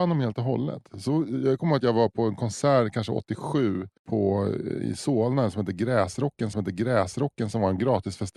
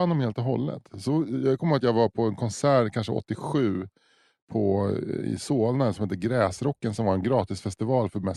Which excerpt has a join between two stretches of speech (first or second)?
first